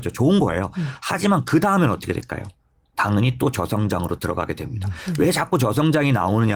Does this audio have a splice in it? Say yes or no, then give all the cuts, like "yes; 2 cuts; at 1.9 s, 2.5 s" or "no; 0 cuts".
no; 0 cuts